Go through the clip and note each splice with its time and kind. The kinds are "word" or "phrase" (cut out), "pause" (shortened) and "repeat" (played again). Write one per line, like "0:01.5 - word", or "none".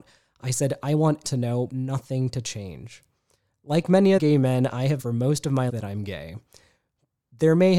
0:01.2 - word
0:01.7 - word
0:04.2 - word
0:05.0 - word
0:05.7 - word